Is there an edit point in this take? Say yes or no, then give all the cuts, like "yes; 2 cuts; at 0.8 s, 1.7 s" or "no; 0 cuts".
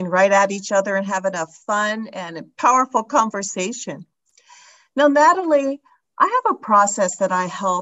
no; 0 cuts